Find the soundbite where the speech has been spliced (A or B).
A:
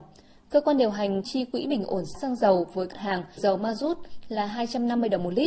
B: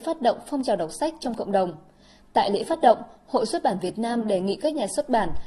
A